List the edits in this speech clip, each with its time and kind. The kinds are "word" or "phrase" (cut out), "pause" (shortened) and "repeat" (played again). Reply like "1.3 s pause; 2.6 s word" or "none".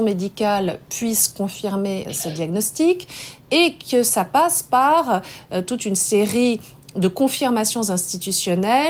none